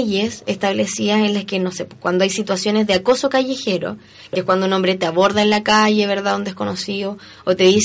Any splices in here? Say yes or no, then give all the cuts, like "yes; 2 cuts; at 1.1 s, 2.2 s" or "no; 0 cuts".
no; 0 cuts